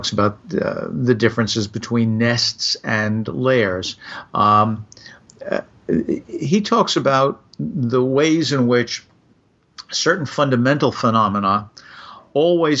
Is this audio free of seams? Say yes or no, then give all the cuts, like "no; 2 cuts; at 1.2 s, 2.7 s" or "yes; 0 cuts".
yes; 0 cuts